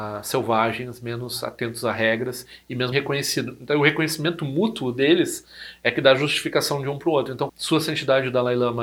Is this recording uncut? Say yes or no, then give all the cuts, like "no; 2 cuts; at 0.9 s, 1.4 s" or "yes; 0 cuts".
no; 2 cuts; at 2.9 s, 7.5 s